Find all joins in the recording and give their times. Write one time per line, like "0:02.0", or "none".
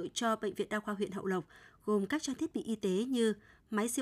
none